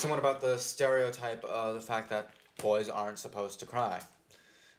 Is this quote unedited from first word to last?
yes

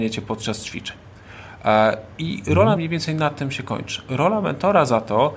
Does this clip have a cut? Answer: yes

